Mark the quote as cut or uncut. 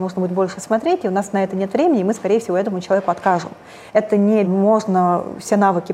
cut